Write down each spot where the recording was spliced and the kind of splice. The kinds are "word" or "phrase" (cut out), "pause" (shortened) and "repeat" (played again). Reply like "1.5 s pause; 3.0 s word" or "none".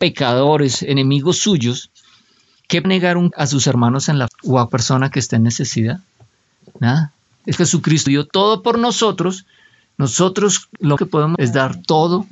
2.8 s word; 3.3 s word; 4.3 s word; 4.7 s word; 7.6 s word; 8.1 s word; 11.0 s word; 11.4 s word